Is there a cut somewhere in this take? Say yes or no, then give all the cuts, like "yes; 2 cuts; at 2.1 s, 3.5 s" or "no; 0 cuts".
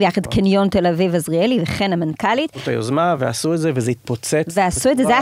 no; 0 cuts